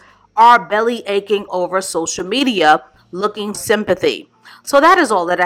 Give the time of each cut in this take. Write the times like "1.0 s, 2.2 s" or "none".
1.5 s, 3.5 s